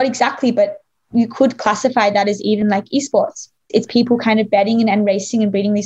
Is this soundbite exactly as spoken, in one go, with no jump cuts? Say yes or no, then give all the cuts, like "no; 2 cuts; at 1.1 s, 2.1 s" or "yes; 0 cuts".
yes; 0 cuts